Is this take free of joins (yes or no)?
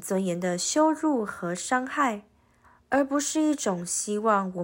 no